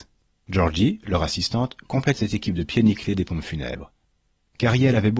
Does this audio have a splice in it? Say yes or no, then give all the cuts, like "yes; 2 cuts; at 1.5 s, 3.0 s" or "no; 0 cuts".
no; 0 cuts